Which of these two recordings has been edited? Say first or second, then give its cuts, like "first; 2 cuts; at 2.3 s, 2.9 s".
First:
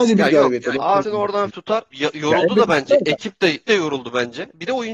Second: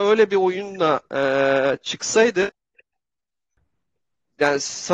first; 4 cuts; at 1.0 s, 1.5 s, 1.9 s, 3.6 s